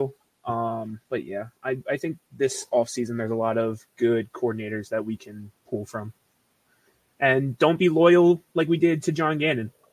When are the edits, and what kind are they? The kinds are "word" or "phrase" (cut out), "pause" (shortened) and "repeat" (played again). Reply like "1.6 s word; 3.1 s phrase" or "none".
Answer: 1.0 s pause; 2.2 s pause; 5.6 s pause; 6.5 s pause